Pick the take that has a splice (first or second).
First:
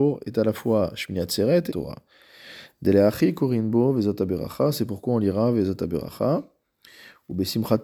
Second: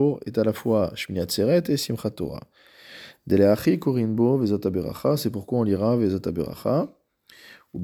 first